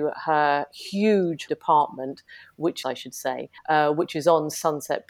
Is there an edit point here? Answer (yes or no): yes